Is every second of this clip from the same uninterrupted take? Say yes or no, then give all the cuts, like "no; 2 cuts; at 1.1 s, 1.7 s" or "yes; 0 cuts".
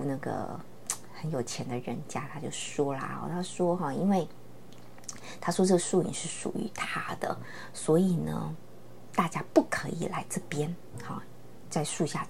yes; 0 cuts